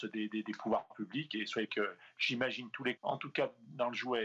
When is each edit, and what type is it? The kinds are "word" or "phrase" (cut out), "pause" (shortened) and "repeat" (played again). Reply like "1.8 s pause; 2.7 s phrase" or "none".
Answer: 1.3 s word; 1.7 s word; 3.0 s word